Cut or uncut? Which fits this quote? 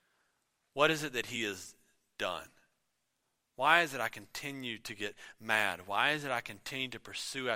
uncut